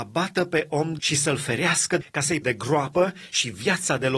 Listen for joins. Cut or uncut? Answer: cut